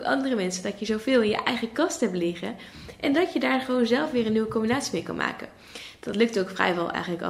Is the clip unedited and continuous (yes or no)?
yes